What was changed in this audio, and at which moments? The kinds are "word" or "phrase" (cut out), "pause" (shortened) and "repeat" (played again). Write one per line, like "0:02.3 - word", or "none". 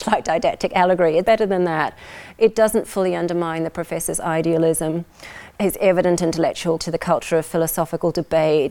0:01.3 - word
0:05.5 - word
0:06.8 - word